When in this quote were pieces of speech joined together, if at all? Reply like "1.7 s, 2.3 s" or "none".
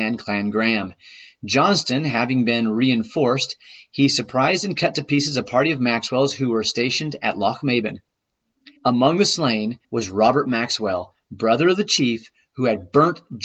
8.8 s, 9.8 s